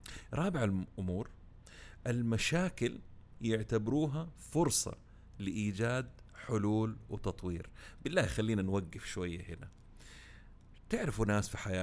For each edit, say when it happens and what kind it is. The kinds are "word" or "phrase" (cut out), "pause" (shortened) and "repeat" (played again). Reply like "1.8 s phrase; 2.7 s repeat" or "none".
none

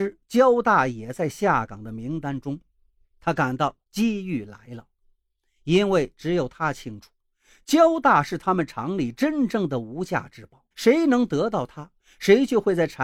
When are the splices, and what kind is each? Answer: 10.7 s pause

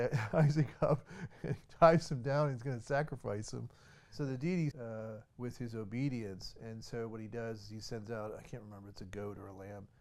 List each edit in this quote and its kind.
4.7 s phrase; 5.3 s pause

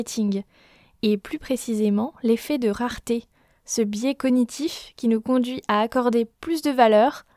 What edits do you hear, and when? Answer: none

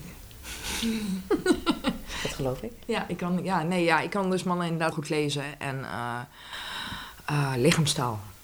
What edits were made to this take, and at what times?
4.9 s word

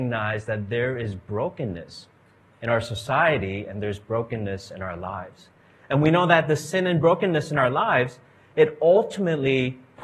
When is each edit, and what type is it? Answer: none

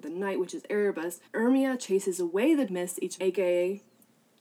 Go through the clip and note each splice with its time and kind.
1.2 s pause; 2.7 s word; 3.2 s word

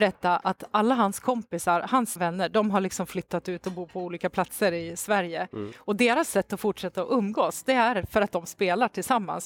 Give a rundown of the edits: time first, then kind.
2.2 s word

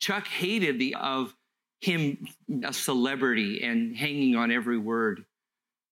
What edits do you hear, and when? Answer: 0.9 s word; 2.6 s word

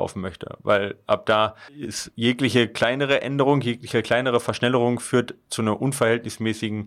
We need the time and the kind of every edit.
1.7 s pause

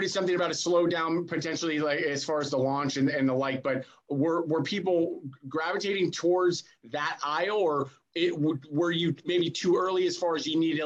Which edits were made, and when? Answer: none

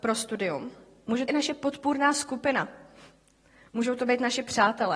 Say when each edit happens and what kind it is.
1.3 s phrase

